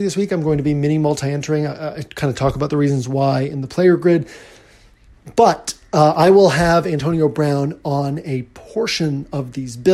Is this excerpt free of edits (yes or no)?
yes